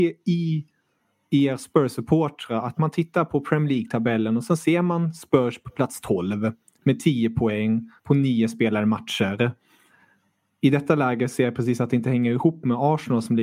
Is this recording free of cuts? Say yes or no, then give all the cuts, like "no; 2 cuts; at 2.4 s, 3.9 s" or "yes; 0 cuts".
no; 1 cut; at 8.0 s